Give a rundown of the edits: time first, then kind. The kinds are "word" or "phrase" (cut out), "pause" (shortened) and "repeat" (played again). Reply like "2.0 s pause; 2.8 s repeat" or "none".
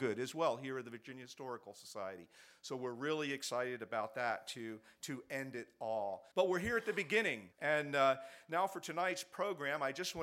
6.3 s pause; 7.5 s pause